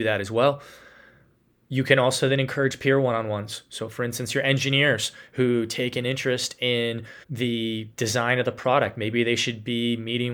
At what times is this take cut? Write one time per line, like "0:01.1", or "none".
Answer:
0:07.2